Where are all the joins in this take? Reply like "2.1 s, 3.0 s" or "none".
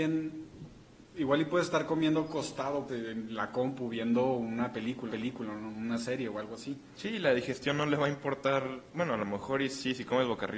1.1 s, 2.9 s, 5.1 s